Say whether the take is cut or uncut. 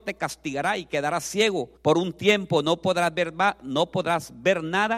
cut